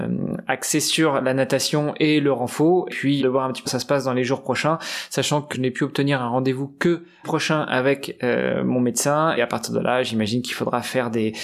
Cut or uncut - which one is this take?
cut